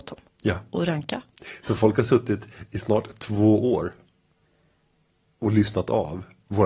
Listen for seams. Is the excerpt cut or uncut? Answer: uncut